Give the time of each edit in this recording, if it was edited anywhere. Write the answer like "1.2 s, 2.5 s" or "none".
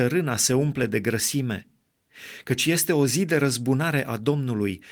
none